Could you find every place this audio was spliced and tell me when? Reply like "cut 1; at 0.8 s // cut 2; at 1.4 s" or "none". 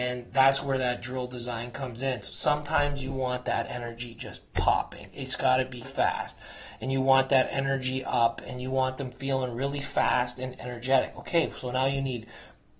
cut 1; at 5.8 s